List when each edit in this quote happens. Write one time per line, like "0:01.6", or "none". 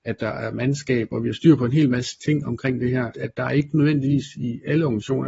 0:03.1